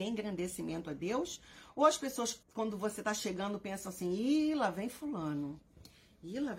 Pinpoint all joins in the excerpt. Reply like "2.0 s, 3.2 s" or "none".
2.4 s